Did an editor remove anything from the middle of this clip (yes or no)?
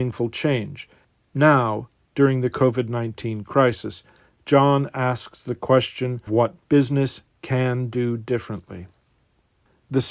yes